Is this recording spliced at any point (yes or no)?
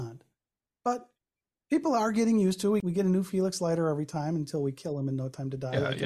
no